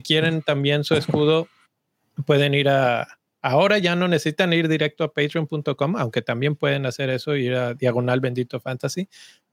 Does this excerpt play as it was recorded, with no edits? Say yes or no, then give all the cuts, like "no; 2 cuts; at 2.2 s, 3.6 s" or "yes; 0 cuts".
yes; 0 cuts